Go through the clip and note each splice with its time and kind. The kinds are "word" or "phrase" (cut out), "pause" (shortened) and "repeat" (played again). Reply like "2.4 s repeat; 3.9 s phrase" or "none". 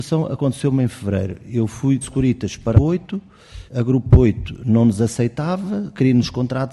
2.0 s phrase; 2.7 s phrase; 3.7 s pause